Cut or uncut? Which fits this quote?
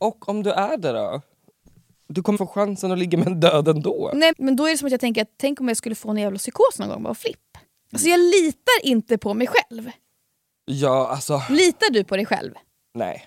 cut